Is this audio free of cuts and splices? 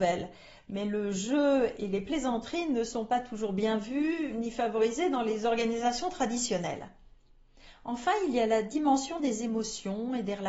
yes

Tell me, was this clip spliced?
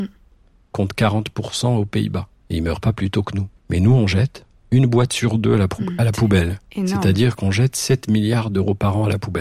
yes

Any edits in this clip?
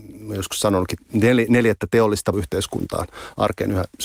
yes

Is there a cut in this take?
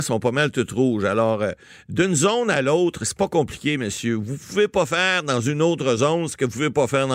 no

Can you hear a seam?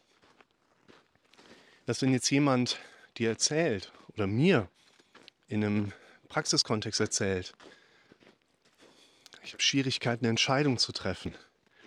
no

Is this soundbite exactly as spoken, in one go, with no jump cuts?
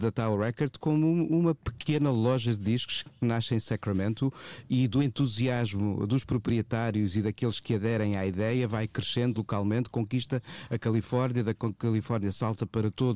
yes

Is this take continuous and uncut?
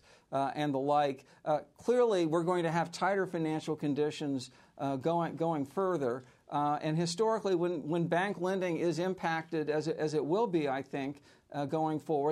yes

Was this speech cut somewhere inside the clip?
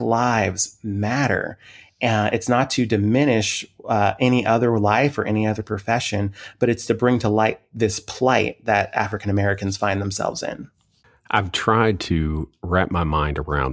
no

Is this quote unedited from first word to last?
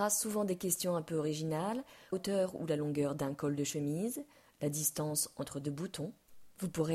no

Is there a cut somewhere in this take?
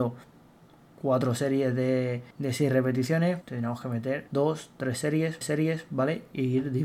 yes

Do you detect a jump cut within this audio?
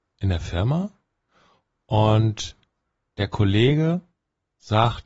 no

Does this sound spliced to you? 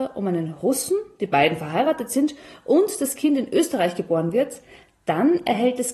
no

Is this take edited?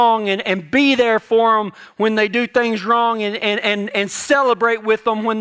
no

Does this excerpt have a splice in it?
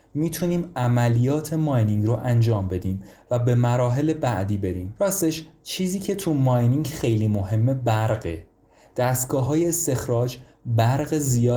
no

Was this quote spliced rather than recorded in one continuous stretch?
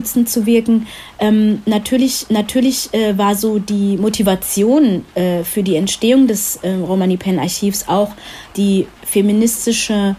yes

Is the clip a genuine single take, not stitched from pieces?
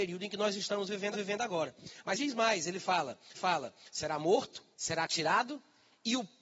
no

